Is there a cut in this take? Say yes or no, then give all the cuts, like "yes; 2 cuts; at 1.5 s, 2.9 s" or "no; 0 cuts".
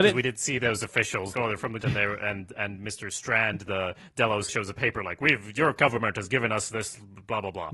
yes; 3 cuts; at 1.3 s, 1.8 s, 4.5 s